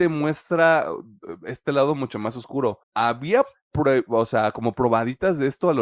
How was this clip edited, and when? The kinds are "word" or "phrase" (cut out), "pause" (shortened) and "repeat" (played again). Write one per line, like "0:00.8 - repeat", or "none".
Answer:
0:02.8 - pause